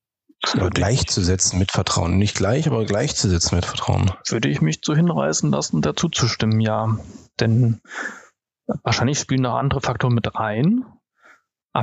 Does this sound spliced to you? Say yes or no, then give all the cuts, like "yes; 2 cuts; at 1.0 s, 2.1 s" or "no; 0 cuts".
no; 0 cuts